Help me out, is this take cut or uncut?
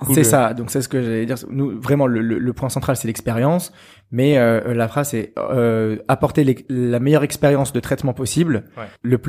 uncut